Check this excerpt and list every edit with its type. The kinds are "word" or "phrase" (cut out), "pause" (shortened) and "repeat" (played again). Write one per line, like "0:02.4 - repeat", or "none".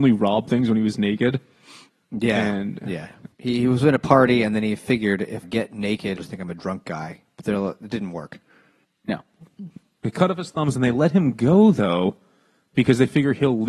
0:03.3 - pause
0:05.4 - phrase
0:06.2 - phrase